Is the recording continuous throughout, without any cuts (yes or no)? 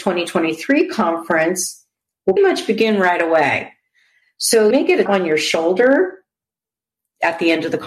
no